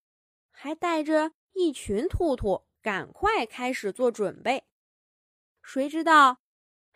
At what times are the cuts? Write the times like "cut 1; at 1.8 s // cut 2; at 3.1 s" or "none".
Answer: cut 1; at 2.8 s

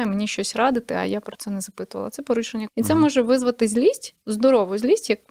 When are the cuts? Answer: cut 1; at 2.7 s

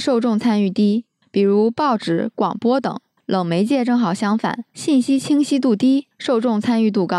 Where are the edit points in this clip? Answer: none

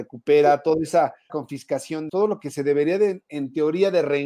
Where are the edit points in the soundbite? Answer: cut 1; at 1.3 s // cut 2; at 2.1 s

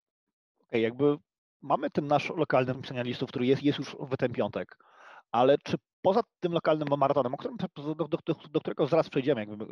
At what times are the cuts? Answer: cut 1; at 2.7 s

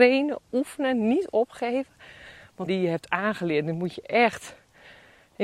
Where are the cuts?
cut 1; at 2.7 s

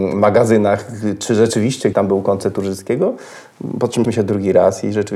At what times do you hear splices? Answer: cut 1; at 1.9 s // cut 2; at 4.0 s

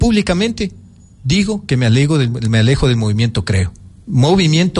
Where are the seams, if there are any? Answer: none

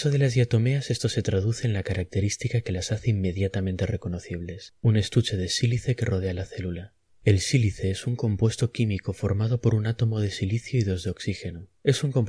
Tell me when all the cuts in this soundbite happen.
none

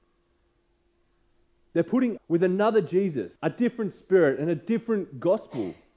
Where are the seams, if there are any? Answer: cut 1; at 2.2 s // cut 2; at 3.4 s

